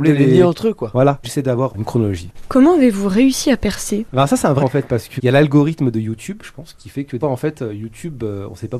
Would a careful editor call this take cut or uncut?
cut